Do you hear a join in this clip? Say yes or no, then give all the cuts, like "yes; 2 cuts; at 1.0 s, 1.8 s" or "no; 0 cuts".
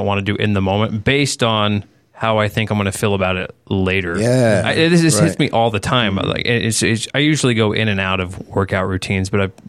no; 0 cuts